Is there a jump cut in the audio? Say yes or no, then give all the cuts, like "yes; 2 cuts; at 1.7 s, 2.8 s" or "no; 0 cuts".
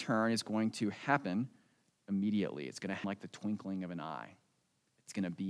yes; 1 cut; at 3.0 s